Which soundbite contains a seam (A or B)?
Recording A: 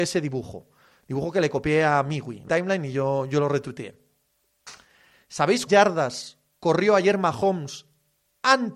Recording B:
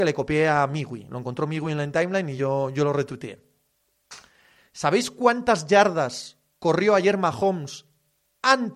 A